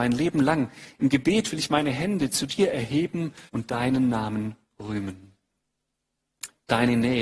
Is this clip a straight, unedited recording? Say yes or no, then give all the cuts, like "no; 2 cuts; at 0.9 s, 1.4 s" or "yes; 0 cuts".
no; 1 cut; at 3.5 s